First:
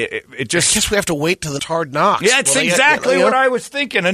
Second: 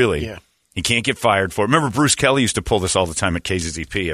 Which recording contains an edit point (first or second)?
first